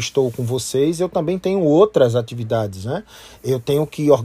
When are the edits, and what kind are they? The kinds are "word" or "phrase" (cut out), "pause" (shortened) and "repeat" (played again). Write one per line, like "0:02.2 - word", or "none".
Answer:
none